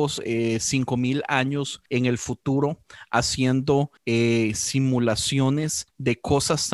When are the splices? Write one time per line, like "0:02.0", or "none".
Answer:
0:04.0